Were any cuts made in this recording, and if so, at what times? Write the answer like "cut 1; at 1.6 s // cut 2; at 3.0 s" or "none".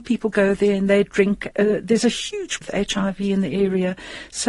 cut 1; at 1.5 s // cut 2; at 2.6 s